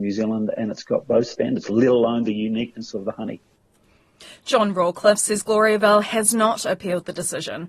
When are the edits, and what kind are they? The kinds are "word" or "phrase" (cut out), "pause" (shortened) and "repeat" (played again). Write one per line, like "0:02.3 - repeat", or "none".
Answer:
none